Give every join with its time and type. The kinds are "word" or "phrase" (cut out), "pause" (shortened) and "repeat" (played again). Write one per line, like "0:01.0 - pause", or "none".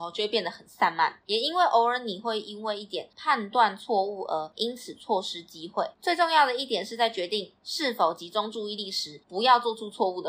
0:01.2 - pause
0:05.9 - pause
0:09.2 - pause